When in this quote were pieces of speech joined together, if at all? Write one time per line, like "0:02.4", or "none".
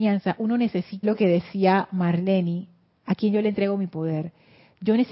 0:01.0